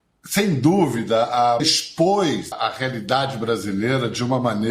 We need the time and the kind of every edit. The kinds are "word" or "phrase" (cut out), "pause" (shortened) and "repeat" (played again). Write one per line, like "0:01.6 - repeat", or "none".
0:01.6 - word
0:02.5 - word